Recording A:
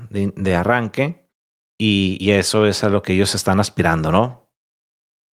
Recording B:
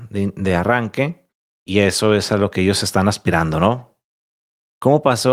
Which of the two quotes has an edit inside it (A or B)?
B